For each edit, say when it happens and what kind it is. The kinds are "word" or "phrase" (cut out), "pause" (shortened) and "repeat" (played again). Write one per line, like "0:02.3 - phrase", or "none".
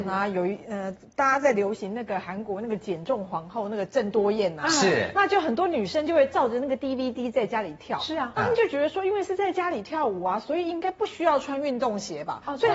none